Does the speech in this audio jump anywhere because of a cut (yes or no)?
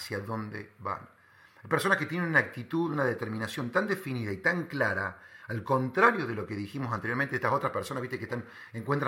no